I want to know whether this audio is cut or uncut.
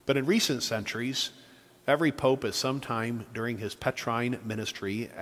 uncut